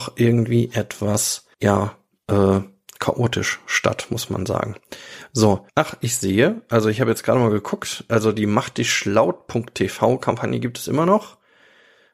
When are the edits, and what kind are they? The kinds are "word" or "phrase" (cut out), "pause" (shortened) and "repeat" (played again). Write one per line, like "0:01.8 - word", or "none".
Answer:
0:01.5 - pause
0:05.7 - pause